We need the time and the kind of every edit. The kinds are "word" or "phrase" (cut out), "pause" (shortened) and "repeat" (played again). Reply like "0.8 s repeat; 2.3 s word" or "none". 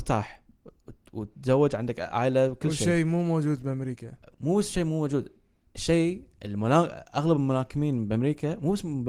none